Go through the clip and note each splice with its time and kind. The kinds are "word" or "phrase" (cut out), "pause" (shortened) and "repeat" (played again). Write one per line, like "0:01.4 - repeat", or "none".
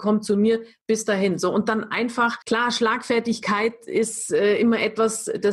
0:02.4 - pause